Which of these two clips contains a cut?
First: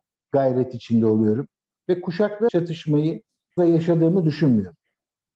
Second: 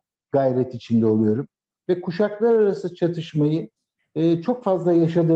first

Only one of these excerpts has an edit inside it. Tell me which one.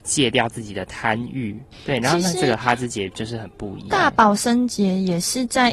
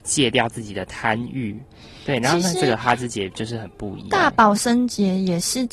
first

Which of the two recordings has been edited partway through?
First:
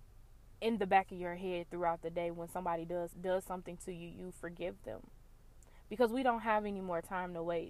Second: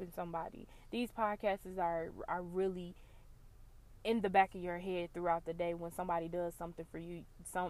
first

